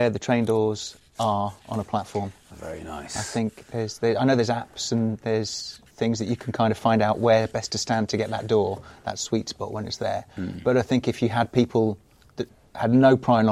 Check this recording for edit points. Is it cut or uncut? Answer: uncut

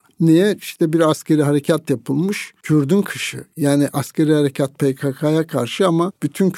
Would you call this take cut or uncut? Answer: cut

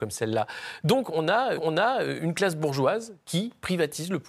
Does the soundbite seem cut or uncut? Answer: cut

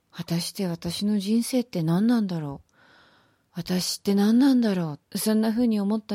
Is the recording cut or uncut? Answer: cut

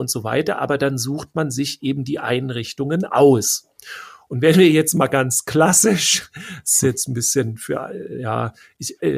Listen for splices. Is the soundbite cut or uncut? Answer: uncut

